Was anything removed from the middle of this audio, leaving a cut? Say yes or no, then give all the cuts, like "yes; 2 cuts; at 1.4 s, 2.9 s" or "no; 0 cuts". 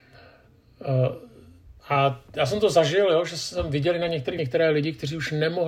yes; 2 cuts; at 1.8 s, 4.4 s